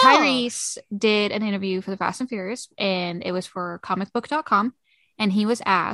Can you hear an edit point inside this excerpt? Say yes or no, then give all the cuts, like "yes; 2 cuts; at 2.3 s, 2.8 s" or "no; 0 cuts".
no; 0 cuts